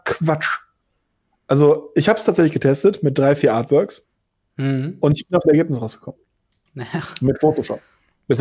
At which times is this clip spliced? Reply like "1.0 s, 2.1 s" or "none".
5.4 s